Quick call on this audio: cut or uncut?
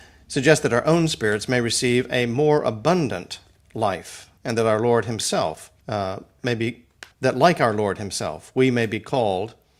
cut